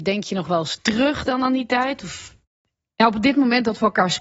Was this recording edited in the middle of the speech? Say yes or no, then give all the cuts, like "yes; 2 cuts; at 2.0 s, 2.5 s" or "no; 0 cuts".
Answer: no; 0 cuts